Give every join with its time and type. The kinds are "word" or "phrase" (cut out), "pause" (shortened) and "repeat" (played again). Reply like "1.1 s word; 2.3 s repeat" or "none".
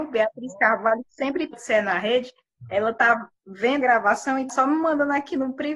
1.5 s word; 3.8 s word; 4.5 s word